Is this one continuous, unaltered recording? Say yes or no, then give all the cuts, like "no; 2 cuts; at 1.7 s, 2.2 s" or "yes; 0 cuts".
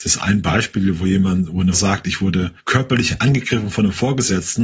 no; 2 cuts; at 1.7 s, 2.6 s